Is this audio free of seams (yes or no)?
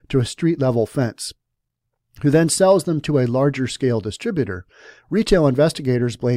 yes